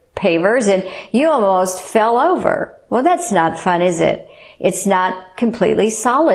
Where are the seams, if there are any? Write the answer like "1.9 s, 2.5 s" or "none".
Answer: none